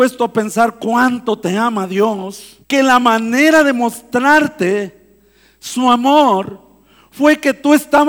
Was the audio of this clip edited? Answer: yes; 1 cut; at 2.6 s

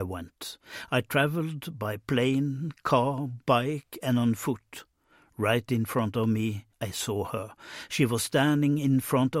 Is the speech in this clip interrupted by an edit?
yes; 1 cut; at 6.7 s

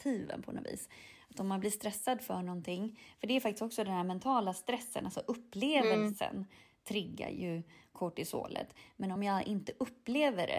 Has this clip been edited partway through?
no; 0 cuts

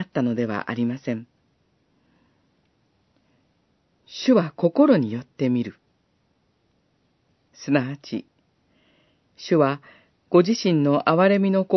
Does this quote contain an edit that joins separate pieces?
no; 0 cuts

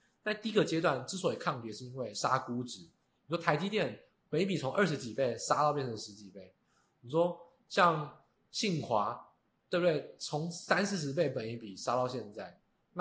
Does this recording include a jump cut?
no; 0 cuts

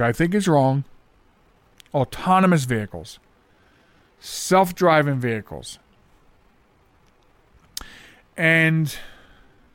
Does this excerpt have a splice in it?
no; 0 cuts

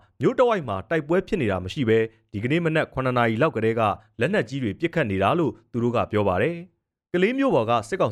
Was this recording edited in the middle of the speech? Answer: no; 0 cuts

